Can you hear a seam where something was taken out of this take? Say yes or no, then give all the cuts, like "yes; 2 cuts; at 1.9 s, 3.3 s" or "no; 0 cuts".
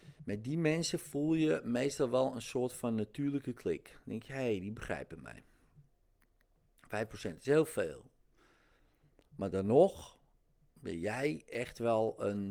no; 0 cuts